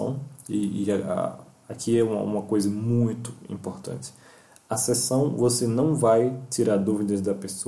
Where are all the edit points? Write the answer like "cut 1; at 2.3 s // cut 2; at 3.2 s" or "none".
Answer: none